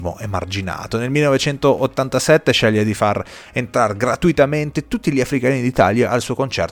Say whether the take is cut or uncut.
uncut